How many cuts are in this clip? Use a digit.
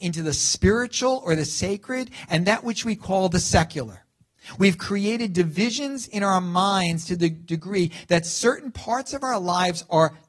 0